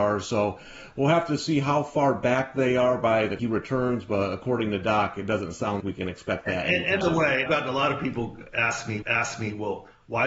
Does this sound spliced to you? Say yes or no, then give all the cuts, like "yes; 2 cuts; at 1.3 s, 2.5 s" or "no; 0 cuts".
yes; 5 cuts; at 3.4 s, 5.8 s, 7.0 s, 7.5 s, 9.0 s